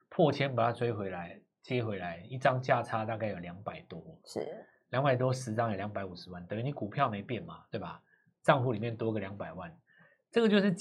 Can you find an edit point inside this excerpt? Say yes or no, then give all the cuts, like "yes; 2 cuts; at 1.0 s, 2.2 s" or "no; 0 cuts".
no; 0 cuts